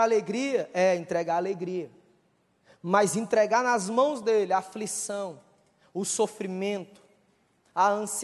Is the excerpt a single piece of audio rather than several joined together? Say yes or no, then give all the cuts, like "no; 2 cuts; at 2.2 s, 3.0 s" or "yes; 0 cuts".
yes; 0 cuts